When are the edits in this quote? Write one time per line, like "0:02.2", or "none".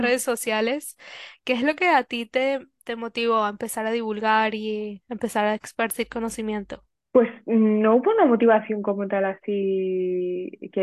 none